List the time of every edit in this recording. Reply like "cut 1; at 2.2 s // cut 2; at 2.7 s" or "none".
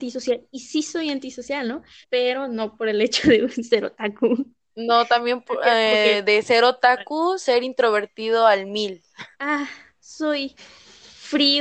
cut 1; at 2.0 s // cut 2; at 9.3 s